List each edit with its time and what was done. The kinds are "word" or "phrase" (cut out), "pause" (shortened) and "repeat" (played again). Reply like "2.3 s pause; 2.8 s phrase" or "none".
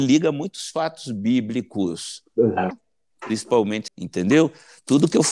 2.7 s phrase; 3.9 s phrase